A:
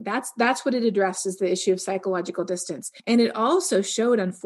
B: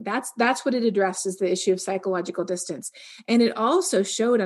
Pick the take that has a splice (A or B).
A